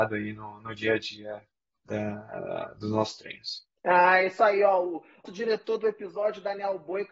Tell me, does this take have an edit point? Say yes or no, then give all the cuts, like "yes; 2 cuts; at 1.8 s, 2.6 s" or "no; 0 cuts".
yes; 2 cuts; at 3.8 s, 5.3 s